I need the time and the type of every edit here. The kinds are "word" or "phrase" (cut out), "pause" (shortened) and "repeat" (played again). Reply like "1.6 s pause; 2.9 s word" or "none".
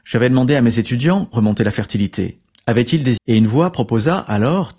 1.3 s word; 3.2 s word